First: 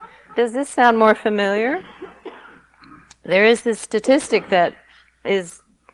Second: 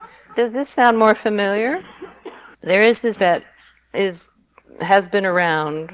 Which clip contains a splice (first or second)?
second